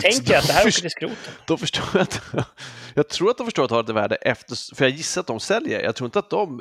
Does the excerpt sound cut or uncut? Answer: uncut